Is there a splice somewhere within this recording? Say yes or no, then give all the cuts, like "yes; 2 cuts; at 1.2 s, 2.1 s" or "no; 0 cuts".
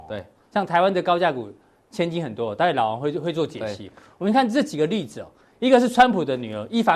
no; 0 cuts